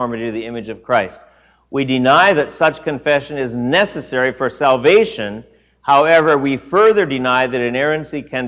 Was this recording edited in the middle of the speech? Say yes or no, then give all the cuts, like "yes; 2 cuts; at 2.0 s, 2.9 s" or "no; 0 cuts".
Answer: no; 0 cuts